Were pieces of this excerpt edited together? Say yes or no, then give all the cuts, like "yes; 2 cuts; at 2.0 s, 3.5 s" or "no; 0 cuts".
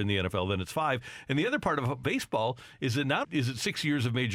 yes; 2 cuts; at 2.0 s, 3.2 s